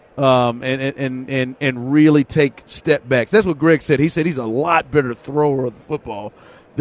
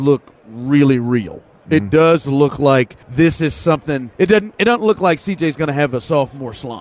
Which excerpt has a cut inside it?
second; 2 cuts; at 3.0 s, 4.1 s

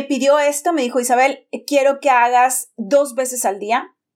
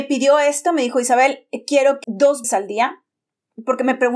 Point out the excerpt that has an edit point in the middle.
second; 2 cuts; at 2.0 s, 2.4 s

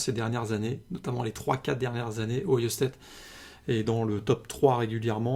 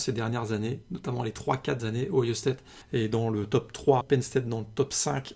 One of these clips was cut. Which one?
second; 3 cuts; at 1.8 s, 2.8 s, 4.0 s

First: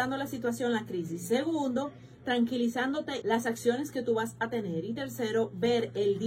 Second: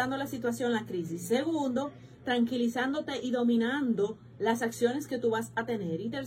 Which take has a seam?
first; 1 cut; at 3.2 s

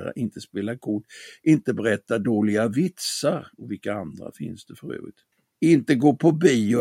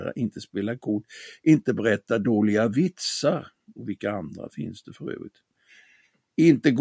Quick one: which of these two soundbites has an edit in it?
first; 2 cuts; at 3.5 s, 5.3 s

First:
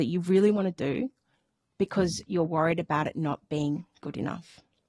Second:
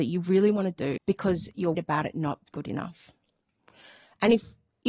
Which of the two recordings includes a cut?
second; 3 cuts; at 1.0 s, 1.7 s, 2.5 s

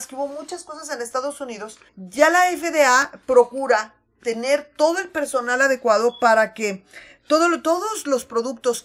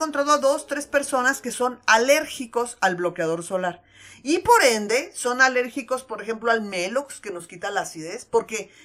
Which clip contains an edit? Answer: first; 1 cut; at 1.9 s

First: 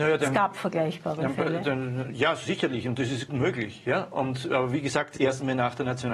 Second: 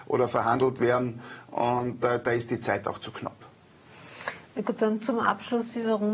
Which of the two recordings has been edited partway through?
first; 2 cuts; at 3.3 s, 5.2 s

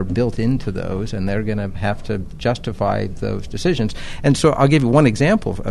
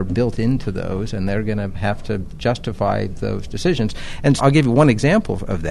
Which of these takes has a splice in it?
second; 1 cut; at 4.4 s

